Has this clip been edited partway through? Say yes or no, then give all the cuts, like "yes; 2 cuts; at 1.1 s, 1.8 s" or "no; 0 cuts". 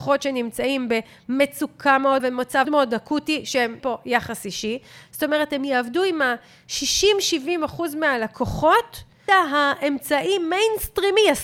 yes; 4 cuts; at 2.2 s, 2.6 s, 3.8 s, 9.3 s